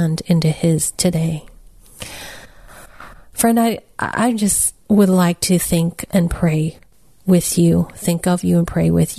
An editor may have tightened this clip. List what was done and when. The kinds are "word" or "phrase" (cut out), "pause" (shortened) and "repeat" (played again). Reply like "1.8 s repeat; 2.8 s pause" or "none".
none